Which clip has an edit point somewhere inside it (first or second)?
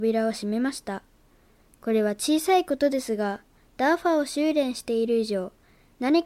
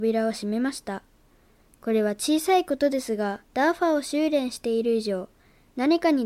second